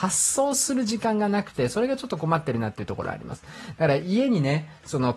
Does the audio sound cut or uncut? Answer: uncut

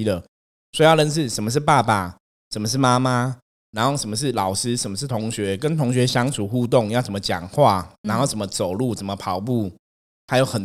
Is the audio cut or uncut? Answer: uncut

